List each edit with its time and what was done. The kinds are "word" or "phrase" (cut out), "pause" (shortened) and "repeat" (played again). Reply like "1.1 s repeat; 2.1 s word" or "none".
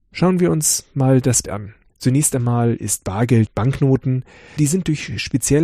1.4 s word; 1.9 s pause; 3.5 s word; 4.6 s word